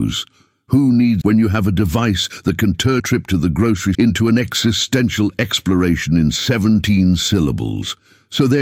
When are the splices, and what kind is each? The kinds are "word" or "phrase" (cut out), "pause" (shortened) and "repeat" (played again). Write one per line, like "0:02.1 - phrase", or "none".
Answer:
0:01.2 - phrase
0:03.0 - word
0:03.9 - word